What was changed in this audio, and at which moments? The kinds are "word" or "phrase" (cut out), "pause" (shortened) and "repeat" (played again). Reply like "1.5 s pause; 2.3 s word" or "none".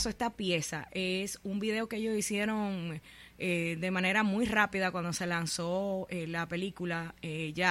none